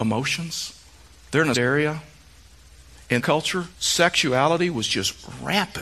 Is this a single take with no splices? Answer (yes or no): no